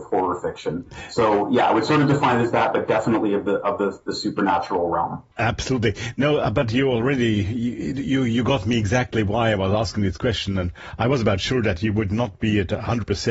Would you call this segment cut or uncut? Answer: cut